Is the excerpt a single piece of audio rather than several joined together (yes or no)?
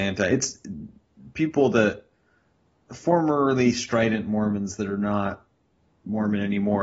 yes